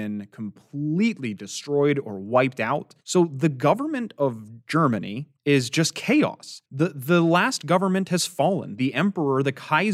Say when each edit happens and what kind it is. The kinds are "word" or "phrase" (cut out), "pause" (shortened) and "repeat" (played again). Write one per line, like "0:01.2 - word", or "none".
0:03.0 - pause
0:05.4 - pause
0:06.7 - pause